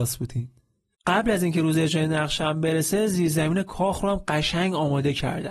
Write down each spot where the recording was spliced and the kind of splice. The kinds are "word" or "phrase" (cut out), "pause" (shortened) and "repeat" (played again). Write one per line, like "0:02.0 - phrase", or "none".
none